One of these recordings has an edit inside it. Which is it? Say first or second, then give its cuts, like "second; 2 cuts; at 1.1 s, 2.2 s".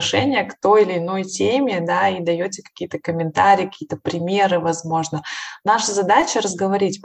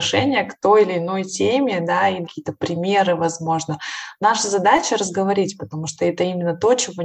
second; 1 cut; at 2.2 s